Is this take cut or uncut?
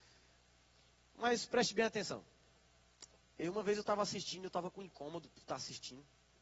uncut